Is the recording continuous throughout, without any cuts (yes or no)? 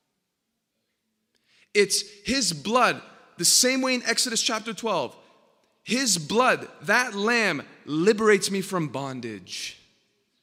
yes